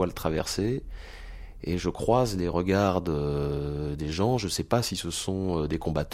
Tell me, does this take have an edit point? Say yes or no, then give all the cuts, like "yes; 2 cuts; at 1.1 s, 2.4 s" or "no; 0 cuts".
no; 0 cuts